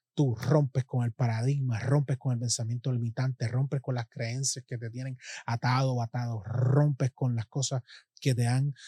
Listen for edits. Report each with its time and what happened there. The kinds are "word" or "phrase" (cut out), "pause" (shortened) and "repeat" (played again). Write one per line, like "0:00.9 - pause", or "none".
none